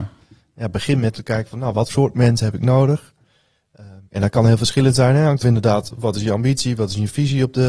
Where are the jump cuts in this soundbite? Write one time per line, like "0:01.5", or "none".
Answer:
0:01.1
0:01.9
0:04.1
0:05.4